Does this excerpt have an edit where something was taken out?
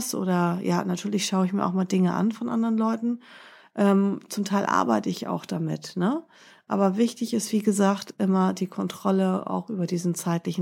no; 0 cuts

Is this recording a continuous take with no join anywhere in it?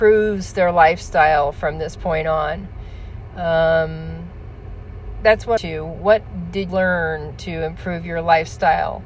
no; 2 cuts; at 5.6 s, 6.7 s

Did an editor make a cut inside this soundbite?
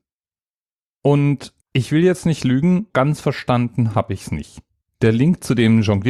yes; 3 cuts; at 1.6 s, 2.9 s, 4.8 s

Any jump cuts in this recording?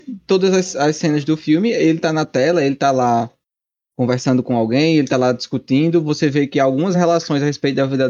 no; 0 cuts

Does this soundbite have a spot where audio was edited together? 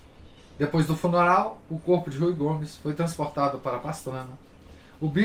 no; 0 cuts

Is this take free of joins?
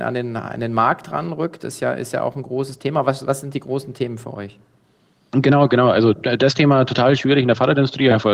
yes; 0 cuts

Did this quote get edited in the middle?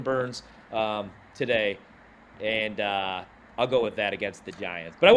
no; 0 cuts

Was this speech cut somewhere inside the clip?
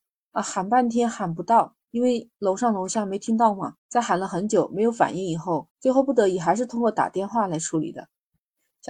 yes; 2 cuts; at 3.8 s, 5.7 s

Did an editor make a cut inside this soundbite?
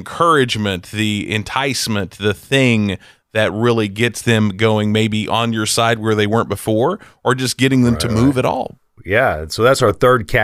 no; 0 cuts

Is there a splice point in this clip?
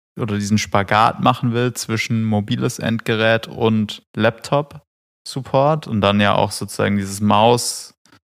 yes; 1 cut; at 4.1 s

